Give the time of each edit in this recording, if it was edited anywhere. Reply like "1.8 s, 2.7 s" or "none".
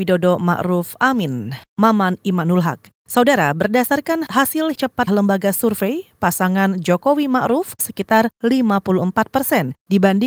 4.7 s, 5.1 s, 7.8 s